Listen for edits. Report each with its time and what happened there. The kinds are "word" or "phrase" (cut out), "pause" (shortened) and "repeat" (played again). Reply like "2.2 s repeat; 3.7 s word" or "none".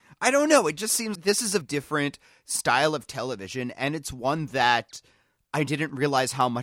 1.2 s word; 1.6 s word